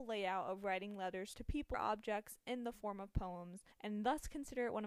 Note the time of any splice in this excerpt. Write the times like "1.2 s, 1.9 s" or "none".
1.7 s, 3.7 s